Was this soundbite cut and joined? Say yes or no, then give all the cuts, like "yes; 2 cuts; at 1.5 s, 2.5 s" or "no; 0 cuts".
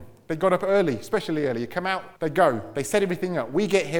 yes; 1 cut; at 2.2 s